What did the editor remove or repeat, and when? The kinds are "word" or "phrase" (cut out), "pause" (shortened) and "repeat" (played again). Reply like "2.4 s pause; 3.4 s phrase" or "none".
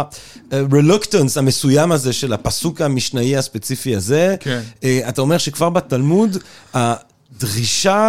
none